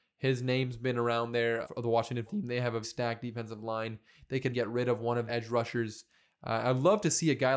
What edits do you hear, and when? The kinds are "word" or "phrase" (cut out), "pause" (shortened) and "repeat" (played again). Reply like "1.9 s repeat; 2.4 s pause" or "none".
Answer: 1.6 s word; 2.3 s word; 2.8 s word; 4.5 s word; 5.3 s word